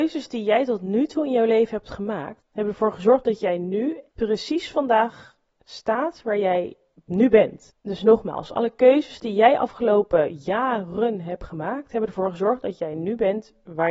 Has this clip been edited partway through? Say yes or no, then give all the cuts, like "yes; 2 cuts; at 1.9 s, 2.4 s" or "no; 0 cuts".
no; 0 cuts